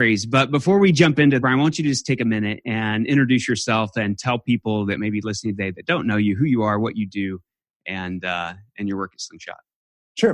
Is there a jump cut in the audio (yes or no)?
yes